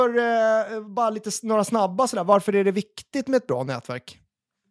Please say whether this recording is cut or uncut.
uncut